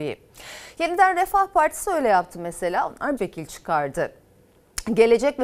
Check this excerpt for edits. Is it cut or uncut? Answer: cut